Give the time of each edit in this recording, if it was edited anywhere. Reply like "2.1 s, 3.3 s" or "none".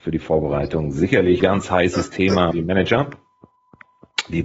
1.4 s, 2.5 s